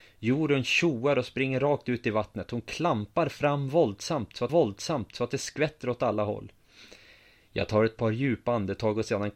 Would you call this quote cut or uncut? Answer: cut